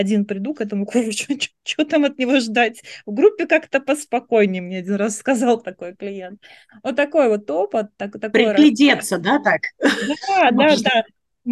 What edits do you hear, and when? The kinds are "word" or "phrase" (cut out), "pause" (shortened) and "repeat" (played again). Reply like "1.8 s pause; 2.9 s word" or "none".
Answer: none

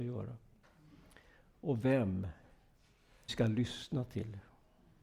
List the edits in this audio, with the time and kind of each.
3.3 s word

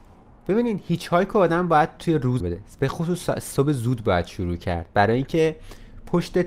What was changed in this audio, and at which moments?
2.4 s word

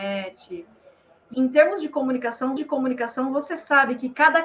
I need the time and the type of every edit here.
1.3 s word; 2.6 s repeat

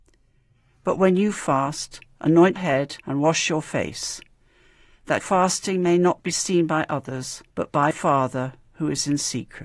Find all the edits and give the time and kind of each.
2.6 s word; 3.0 s pause; 5.2 s word; 7.5 s pause; 7.9 s word

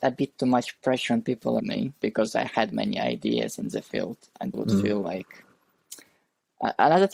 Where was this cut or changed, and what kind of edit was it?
1.6 s word; 2.0 s word; 4.5 s word

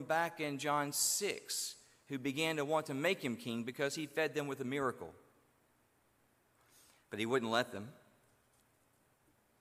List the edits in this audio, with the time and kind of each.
none

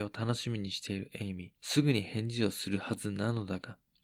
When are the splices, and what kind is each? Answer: 1.6 s pause

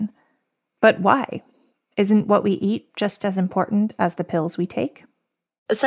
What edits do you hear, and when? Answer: none

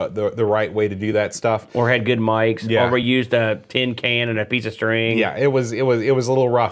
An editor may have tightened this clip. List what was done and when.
none

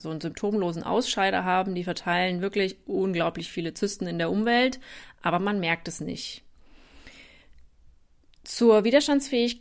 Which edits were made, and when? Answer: none

